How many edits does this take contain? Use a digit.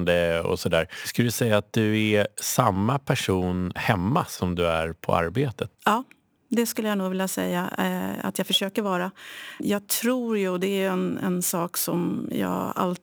1